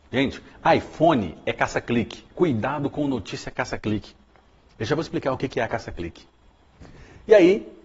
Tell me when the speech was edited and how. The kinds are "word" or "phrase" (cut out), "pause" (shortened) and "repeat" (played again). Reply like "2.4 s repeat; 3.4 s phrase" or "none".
2.3 s pause

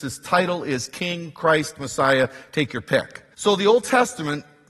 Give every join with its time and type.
3.3 s pause

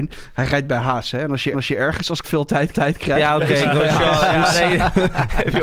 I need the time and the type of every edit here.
1.5 s repeat; 2.2 s word; 2.7 s repeat

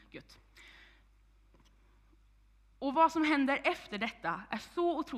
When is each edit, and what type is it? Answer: none

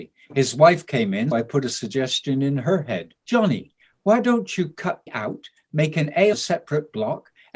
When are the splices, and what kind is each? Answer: 1.3 s word; 3.2 s pause; 5.1 s word; 6.3 s word

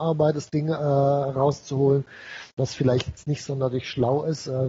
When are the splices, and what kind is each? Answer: none

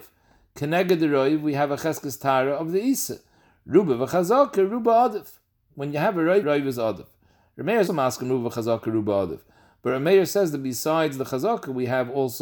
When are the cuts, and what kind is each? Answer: 6.4 s word; 7.9 s word

